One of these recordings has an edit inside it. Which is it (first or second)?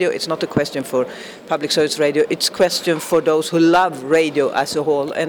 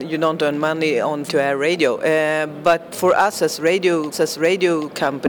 second